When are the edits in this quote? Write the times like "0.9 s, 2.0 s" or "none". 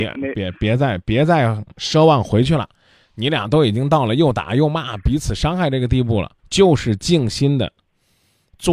6.4 s